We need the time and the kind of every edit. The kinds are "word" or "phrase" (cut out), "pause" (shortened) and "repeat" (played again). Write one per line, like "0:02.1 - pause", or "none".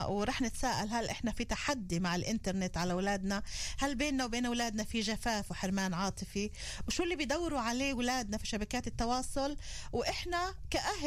none